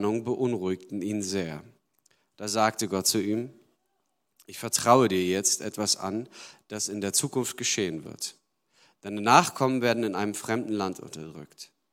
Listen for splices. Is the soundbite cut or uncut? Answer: uncut